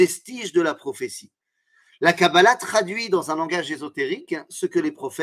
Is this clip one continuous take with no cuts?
yes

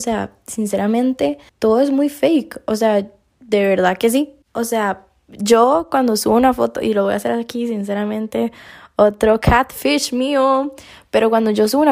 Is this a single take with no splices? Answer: no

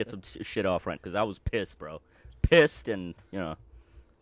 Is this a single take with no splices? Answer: no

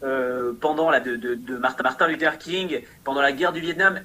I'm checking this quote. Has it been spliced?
yes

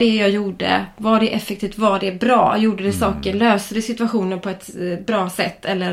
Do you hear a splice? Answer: no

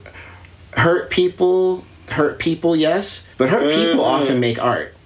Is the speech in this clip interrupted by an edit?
yes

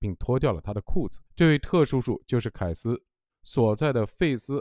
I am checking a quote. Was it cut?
yes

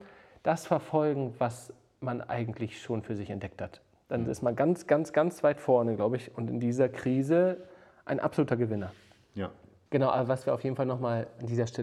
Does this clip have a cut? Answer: no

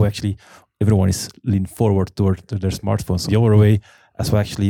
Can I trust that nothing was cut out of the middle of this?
no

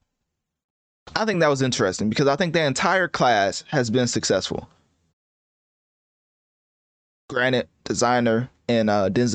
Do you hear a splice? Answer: no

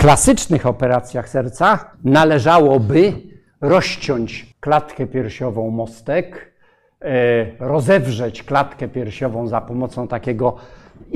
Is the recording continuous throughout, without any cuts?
no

